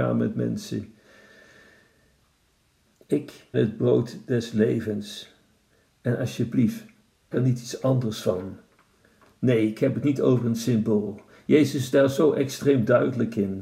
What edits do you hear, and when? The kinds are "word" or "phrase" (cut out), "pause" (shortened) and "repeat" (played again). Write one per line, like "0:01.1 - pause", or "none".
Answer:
0:03.5 - word
0:07.3 - word